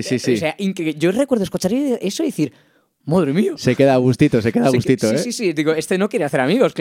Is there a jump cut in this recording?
no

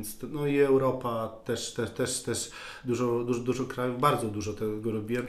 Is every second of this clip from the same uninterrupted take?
yes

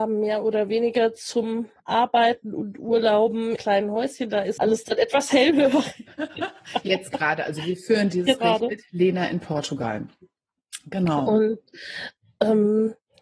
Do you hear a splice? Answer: yes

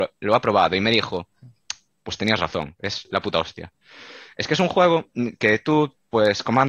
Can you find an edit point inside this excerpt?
no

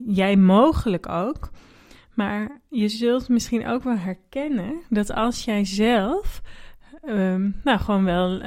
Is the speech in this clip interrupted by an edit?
no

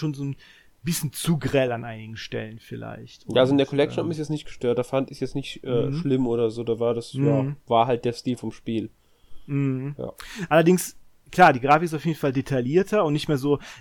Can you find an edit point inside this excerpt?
no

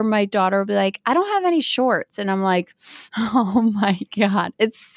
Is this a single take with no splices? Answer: yes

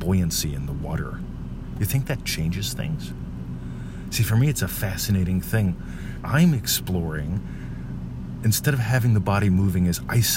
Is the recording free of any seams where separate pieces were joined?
no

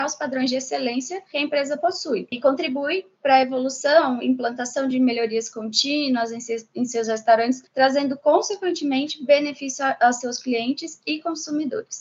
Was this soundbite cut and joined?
no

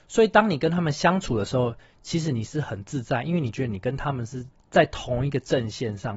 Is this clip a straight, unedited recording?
no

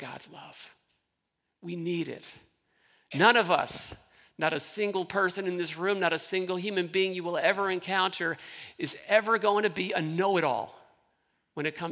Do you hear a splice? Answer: no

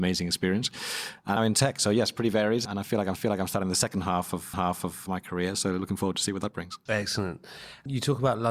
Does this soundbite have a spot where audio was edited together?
yes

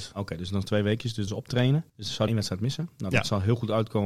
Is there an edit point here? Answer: yes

